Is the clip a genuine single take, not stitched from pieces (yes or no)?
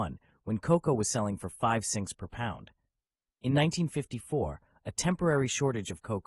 yes